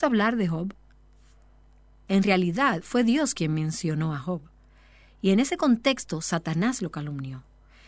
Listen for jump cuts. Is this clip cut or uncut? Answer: uncut